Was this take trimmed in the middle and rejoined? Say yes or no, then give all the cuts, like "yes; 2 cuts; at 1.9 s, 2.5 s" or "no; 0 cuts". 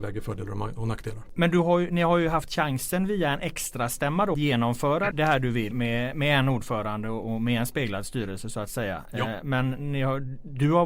yes; 3 cuts; at 4.3 s, 5.1 s, 5.7 s